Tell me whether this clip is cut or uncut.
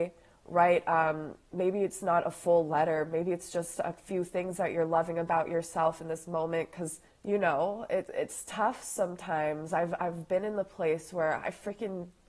cut